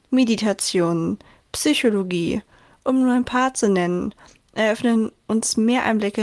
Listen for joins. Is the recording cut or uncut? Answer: uncut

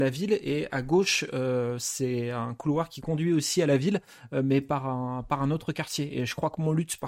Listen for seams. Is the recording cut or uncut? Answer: uncut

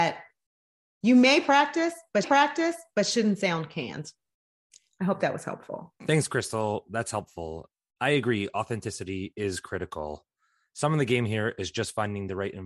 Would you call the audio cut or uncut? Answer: cut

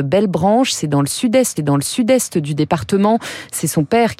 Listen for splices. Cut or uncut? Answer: cut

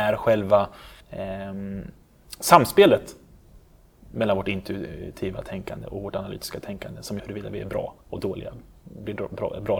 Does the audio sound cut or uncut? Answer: cut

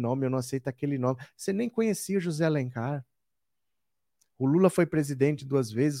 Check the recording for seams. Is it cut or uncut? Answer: uncut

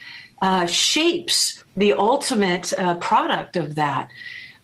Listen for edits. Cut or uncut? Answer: cut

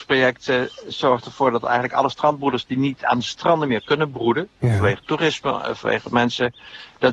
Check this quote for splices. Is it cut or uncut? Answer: uncut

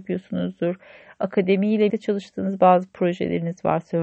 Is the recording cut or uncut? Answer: cut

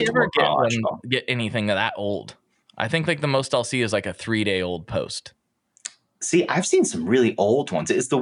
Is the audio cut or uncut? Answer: uncut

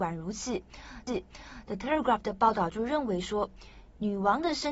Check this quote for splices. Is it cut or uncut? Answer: cut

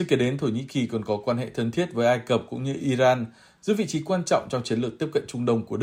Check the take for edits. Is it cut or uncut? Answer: uncut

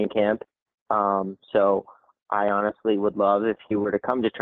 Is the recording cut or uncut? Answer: uncut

